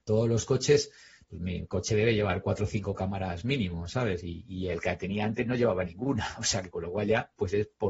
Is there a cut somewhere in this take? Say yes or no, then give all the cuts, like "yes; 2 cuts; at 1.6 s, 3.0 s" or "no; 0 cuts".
no; 0 cuts